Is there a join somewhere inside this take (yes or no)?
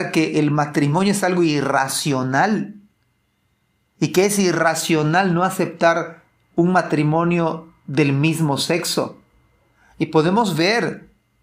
no